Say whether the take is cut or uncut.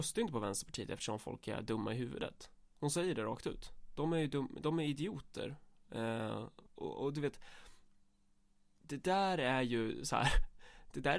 cut